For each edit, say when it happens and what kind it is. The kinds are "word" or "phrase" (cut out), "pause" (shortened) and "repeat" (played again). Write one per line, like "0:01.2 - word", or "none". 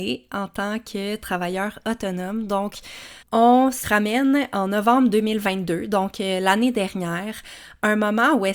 0:03.2 - pause
0:03.8 - phrase